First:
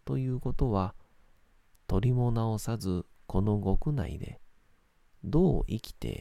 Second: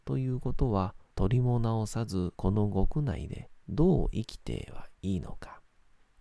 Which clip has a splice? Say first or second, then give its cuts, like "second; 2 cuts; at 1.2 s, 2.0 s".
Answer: second; 4 cuts; at 1.1 s, 2.3 s, 3.6 s, 5.0 s